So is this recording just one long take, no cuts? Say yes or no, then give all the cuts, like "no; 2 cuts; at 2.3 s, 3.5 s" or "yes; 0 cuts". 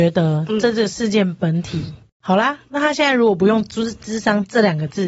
no; 1 cut; at 2.6 s